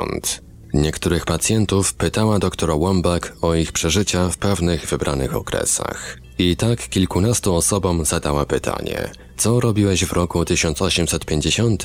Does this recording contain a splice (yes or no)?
no